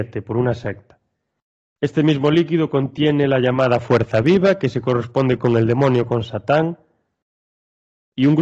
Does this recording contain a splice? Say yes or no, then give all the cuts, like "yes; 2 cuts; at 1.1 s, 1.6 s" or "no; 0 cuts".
no; 0 cuts